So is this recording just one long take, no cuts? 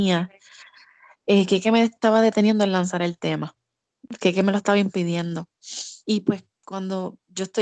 no; 1 cut; at 6.0 s

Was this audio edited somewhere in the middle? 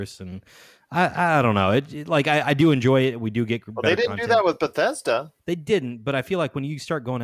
yes; 1 cut; at 5.4 s

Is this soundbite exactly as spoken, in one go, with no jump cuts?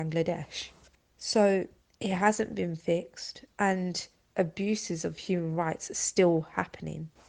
yes; 0 cuts

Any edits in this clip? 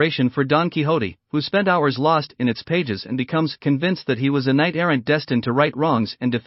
no; 0 cuts

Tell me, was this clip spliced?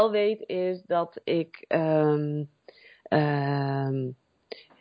no; 0 cuts

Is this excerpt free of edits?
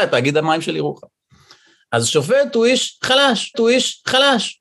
no; 1 cut; at 3.5 s

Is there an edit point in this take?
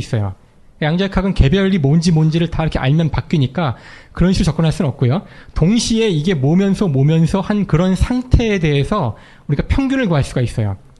no; 0 cuts

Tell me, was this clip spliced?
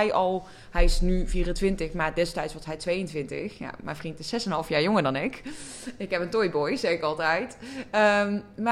no; 0 cuts

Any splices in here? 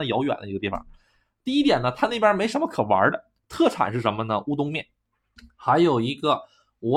no; 0 cuts

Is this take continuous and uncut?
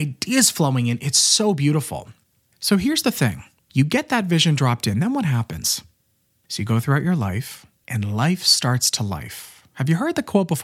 yes; 0 cuts

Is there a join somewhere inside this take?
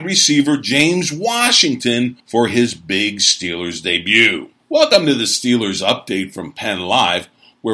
yes; 2 cuts; at 2.2 s, 4.6 s

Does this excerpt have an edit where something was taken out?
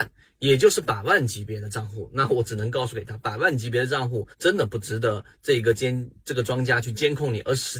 yes; 1 cut; at 4.3 s

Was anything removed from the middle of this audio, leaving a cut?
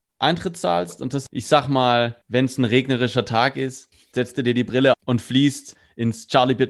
yes; 3 cuts; at 1.3 s, 2.2 s, 4.9 s

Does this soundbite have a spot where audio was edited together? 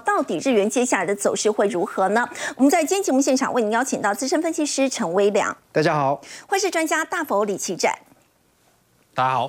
yes; 1 cut; at 5.6 s

